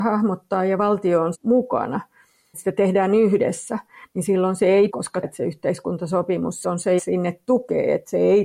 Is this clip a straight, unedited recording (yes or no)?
no